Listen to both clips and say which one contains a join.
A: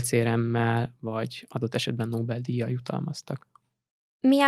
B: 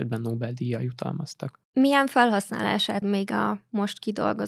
B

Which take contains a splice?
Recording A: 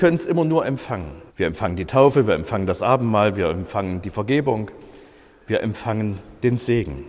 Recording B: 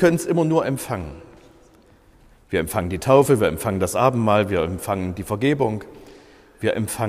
A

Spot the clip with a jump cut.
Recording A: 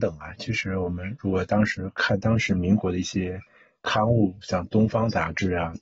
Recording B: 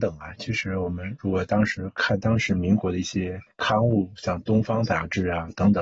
B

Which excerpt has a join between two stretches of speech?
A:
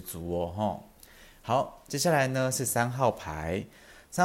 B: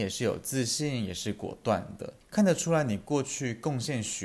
B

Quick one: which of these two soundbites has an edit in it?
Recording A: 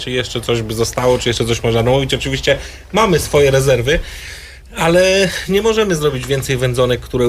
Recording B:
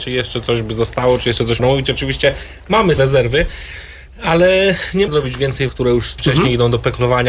B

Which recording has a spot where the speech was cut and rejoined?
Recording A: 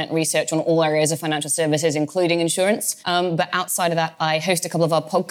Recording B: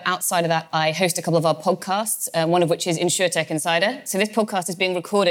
A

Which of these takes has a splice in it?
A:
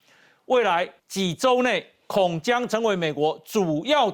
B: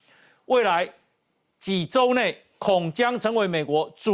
A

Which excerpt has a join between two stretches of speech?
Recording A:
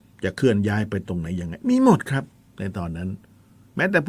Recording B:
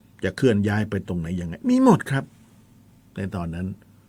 A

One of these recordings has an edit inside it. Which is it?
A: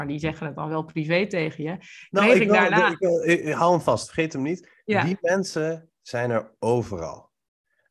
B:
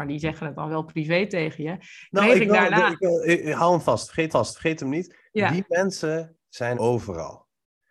B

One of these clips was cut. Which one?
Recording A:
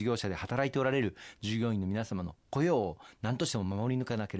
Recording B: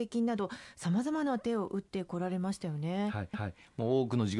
B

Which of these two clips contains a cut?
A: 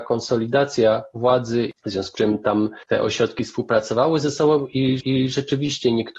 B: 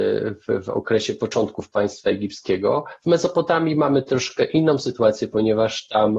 A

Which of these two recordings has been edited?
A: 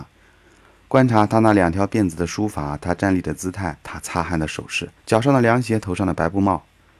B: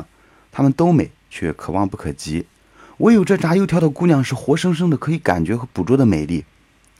A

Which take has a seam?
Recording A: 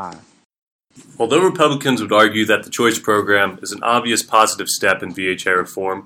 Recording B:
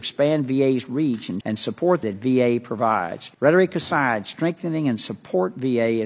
B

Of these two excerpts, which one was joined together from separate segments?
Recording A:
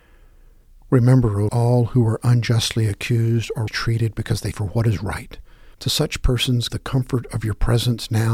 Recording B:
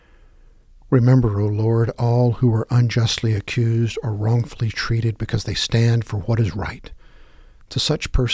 A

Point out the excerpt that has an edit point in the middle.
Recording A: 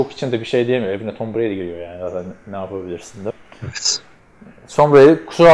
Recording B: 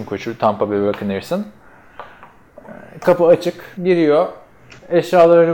B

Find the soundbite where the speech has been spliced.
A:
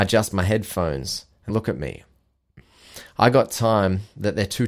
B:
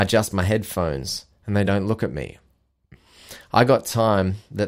A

